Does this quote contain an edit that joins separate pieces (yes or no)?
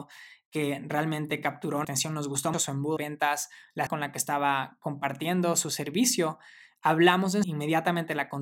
yes